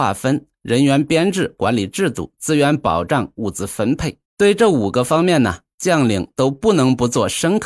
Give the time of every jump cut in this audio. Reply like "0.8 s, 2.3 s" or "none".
4.3 s